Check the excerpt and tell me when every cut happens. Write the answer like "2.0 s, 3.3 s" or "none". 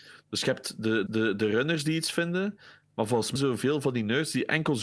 1.1 s, 3.4 s